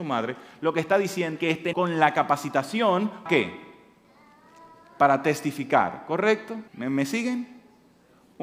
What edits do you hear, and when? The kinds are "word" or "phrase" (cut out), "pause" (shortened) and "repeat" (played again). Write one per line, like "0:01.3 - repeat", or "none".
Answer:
0:01.4 - word
0:01.7 - word
0:03.3 - word
0:06.7 - pause